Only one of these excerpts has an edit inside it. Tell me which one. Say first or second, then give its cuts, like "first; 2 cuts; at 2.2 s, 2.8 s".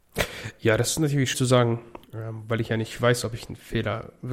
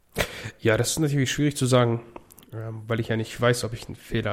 first; 2 cuts; at 1.3 s, 2.0 s